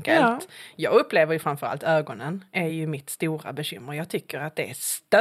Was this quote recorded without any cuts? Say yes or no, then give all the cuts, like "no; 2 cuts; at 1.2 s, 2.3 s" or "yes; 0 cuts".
yes; 0 cuts